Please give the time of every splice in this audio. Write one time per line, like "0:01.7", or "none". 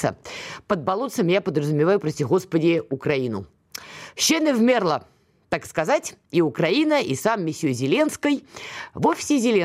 none